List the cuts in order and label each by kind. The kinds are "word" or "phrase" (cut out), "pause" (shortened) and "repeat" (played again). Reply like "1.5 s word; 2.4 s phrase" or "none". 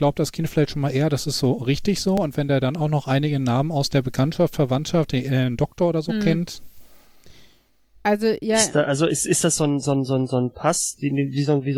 none